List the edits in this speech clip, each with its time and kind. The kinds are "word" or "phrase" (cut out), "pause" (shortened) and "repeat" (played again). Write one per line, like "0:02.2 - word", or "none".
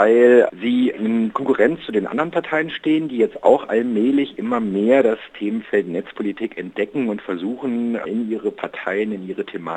none